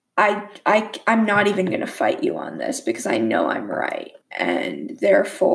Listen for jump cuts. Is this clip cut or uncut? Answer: cut